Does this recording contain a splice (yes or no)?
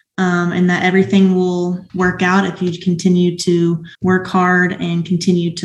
yes